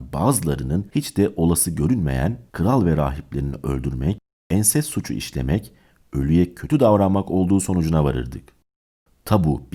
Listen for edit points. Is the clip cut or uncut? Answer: uncut